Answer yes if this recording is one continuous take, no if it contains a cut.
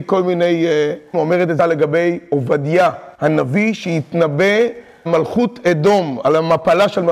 no